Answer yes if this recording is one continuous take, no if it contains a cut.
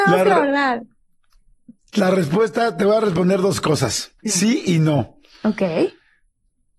no